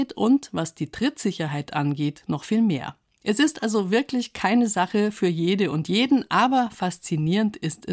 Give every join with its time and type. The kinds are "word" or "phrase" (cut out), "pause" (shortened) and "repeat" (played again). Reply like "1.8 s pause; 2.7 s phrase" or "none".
none